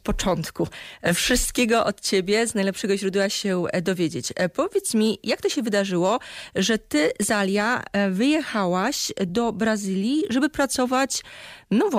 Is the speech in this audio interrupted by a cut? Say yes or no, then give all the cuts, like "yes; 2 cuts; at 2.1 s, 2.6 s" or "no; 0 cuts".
no; 0 cuts